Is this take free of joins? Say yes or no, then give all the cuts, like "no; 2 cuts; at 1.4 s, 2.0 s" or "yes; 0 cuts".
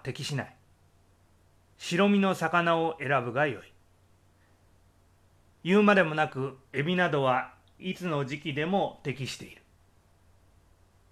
yes; 0 cuts